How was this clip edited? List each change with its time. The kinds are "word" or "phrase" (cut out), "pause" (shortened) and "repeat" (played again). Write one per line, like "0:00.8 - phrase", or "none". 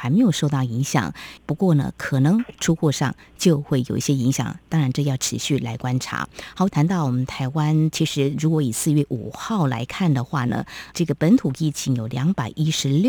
0:01.4 - pause
0:06.7 - phrase
0:10.9 - word